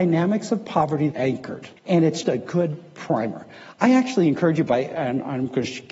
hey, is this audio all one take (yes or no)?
no